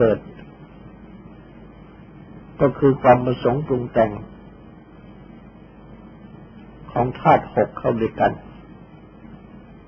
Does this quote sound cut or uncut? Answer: uncut